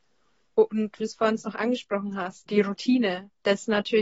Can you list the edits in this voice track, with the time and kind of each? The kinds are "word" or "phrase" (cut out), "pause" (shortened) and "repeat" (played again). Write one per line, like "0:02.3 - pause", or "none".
0:01.0 - word
0:02.5 - word